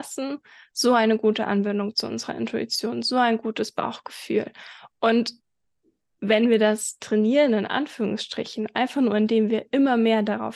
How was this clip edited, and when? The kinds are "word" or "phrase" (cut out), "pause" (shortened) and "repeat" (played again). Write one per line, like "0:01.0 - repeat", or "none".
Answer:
none